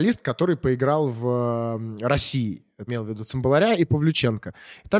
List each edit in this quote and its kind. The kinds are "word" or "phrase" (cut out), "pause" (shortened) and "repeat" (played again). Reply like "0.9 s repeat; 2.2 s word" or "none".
2.9 s phrase

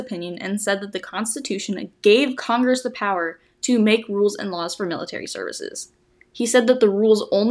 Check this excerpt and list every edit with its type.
none

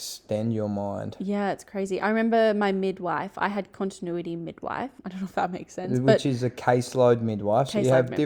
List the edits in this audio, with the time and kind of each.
5.0 s pause

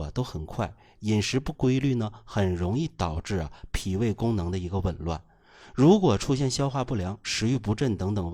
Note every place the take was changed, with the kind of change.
none

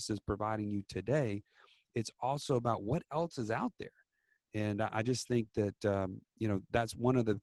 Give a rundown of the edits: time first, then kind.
none

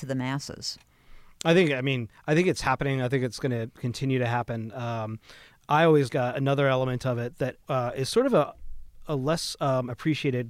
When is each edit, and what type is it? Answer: 6.1 s word; 7.6 s pause

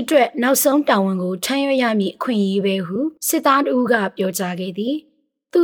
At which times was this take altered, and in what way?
3.2 s pause

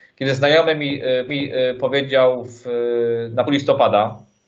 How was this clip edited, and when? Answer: 1.3 s repeat; 3.4 s word

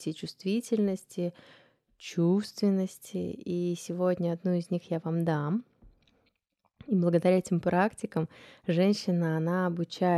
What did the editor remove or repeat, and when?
none

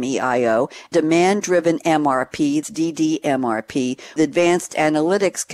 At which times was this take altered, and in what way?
0.9 s word; 2.6 s word; 4.2 s word

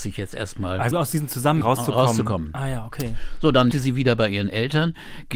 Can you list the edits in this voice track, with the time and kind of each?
0.9 s word; 1.6 s word; 3.7 s word

